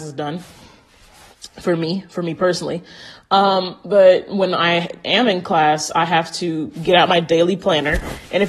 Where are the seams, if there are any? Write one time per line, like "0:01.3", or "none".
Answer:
none